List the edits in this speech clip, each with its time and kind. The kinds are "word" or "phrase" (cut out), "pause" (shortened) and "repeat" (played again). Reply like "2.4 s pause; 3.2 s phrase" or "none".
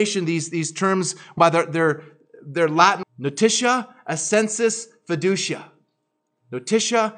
1.4 s word; 3.0 s word